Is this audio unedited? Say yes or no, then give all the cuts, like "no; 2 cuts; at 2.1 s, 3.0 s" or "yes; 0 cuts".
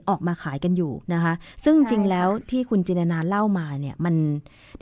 no; 1 cut; at 1.0 s